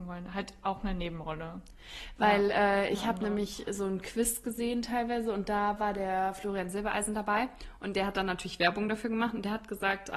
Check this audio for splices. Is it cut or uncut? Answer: uncut